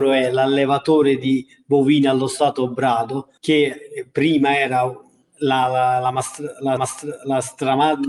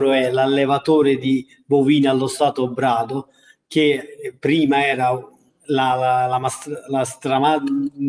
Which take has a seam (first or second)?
first